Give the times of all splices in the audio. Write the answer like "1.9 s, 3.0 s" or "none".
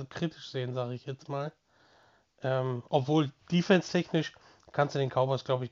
none